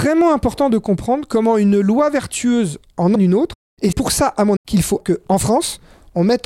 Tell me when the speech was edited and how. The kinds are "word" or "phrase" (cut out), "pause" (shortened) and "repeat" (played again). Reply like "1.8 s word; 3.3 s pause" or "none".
3.2 s word; 3.9 s word; 4.6 s word; 5.0 s word